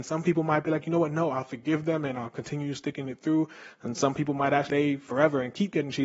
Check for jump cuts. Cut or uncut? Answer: cut